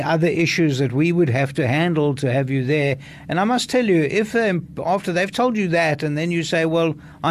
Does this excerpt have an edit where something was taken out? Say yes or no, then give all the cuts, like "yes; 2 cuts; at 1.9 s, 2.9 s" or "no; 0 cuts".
no; 0 cuts